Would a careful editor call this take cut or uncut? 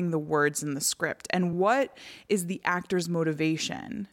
uncut